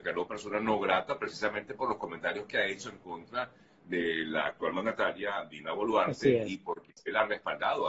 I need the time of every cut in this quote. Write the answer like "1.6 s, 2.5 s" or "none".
none